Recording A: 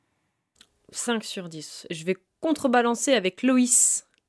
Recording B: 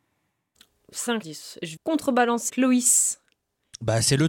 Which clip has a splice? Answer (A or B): B